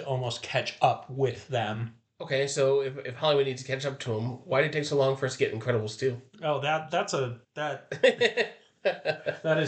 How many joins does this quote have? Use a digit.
1